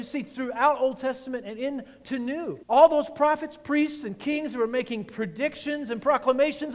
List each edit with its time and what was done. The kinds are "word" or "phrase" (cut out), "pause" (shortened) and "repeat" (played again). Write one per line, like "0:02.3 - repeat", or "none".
0:02.6 - pause